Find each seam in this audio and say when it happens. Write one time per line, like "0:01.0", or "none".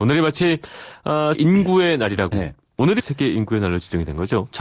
0:01.3
0:02.3
0:03.0

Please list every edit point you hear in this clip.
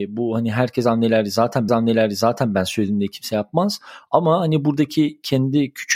0:01.7

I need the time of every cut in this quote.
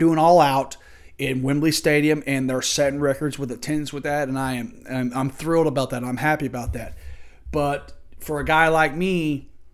none

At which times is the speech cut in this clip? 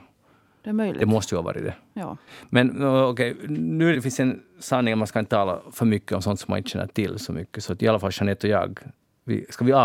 0:03.9

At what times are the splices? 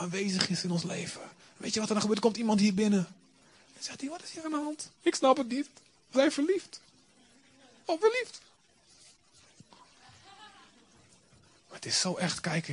0:01.4
0:04.9
0:06.1
0:08.0

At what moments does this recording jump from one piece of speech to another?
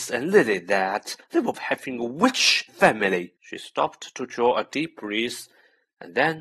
0:01.2
0:01.5
0:02.7
0:03.4

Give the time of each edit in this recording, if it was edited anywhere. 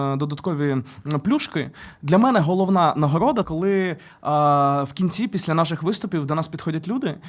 0:03.4

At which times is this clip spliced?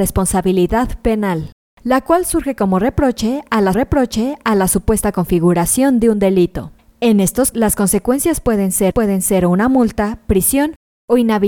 0:01.6
0:03.7
0:06.8
0:07.5
0:08.9

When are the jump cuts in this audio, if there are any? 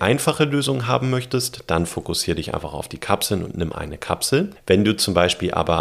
0:03.7

